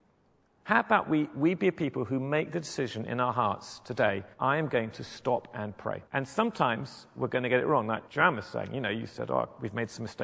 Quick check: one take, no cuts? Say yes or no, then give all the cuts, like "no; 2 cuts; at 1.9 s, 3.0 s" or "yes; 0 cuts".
no; 3 cuts; at 4.3 s, 6.1 s, 8.1 s